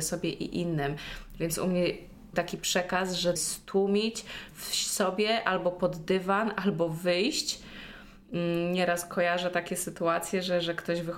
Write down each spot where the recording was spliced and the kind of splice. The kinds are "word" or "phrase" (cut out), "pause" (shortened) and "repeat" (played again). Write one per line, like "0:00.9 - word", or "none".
0:02.3 - word
0:03.4 - phrase